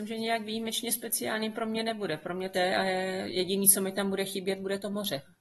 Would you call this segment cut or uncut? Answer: cut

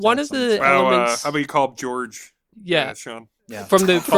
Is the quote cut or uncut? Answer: cut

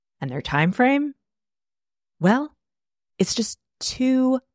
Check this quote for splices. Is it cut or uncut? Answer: uncut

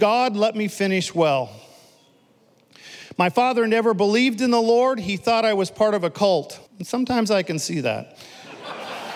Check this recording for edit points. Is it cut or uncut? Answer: cut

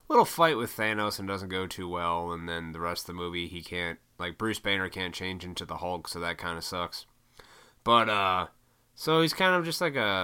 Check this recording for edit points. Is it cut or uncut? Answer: uncut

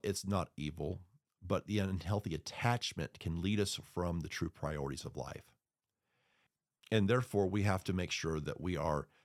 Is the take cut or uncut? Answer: uncut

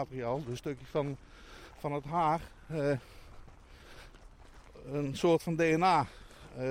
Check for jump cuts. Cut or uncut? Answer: uncut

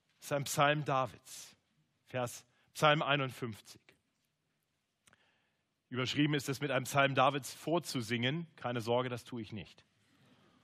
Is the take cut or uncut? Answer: uncut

